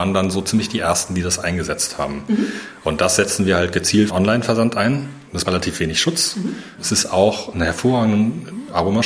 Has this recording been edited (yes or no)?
yes